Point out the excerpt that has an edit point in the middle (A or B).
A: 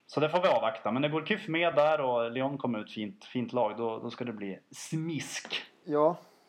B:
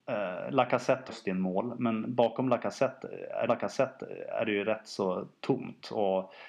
B